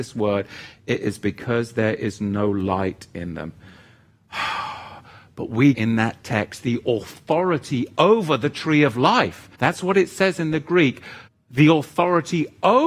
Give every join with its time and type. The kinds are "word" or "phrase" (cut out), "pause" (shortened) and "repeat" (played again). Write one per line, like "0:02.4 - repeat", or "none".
0:05.7 - word
0:09.5 - pause
0:11.3 - pause